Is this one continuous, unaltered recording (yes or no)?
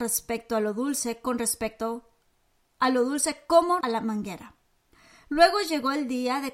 no